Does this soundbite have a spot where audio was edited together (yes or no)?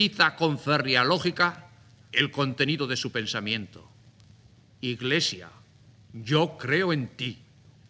no